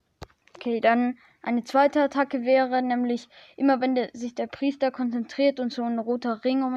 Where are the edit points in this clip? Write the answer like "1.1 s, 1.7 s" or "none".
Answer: none